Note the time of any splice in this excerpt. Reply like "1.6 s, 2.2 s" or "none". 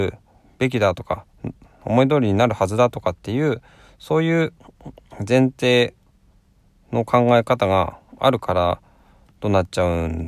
none